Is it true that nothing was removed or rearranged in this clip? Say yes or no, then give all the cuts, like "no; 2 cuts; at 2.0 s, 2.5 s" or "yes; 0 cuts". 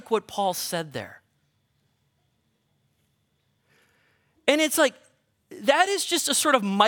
yes; 0 cuts